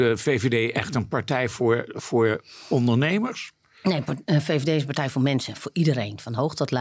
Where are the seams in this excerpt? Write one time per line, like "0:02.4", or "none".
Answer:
none